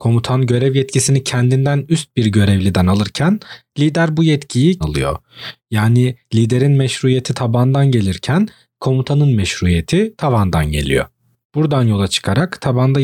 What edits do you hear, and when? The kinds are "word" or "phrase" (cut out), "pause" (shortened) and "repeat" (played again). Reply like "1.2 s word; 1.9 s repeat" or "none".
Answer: 4.8 s phrase